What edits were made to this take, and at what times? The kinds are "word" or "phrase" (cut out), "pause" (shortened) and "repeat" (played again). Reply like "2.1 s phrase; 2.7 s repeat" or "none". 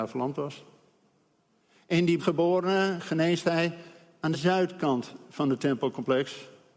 2.2 s word; 4.3 s word